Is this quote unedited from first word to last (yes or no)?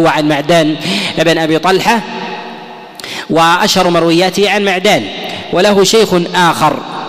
yes